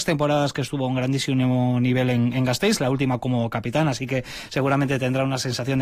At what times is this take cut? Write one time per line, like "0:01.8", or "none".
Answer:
none